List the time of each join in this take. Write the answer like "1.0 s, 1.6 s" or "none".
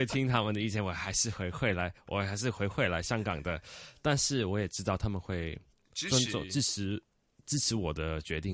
none